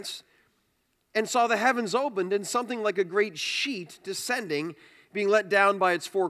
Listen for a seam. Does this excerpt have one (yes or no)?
no